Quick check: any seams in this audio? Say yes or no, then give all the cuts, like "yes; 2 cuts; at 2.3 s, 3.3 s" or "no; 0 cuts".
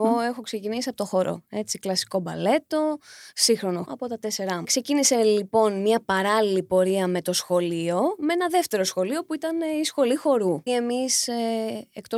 yes; 3 cuts; at 3.9 s, 4.6 s, 10.7 s